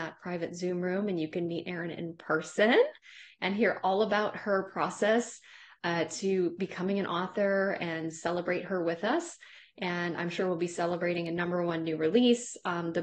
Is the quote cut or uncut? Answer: uncut